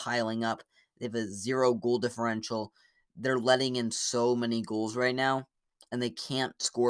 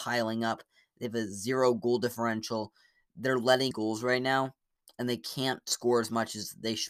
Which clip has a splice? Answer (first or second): second